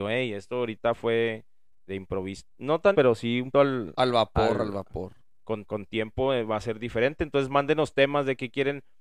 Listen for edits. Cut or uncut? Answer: cut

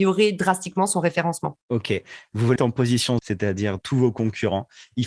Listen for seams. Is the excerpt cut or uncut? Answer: cut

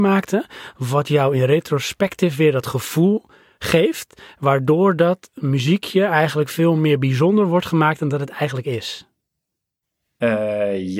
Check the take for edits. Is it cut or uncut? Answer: uncut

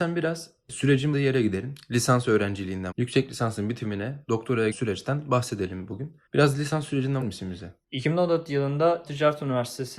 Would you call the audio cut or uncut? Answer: cut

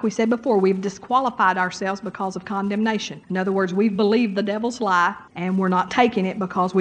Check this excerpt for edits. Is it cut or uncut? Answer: cut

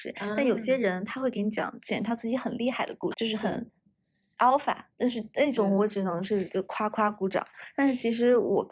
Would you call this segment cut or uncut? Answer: cut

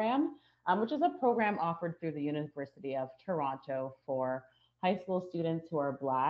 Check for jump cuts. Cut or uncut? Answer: uncut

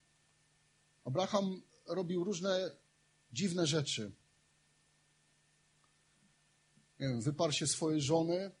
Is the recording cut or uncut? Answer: uncut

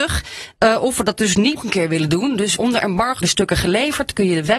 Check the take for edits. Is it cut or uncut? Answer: cut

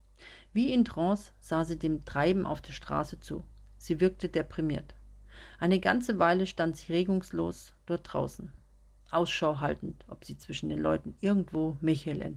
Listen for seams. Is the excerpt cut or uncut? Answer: uncut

